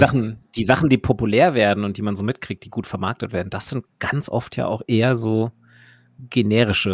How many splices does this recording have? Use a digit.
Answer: 0